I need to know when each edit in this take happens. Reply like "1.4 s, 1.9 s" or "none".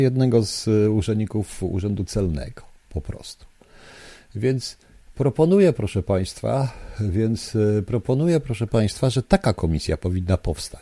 none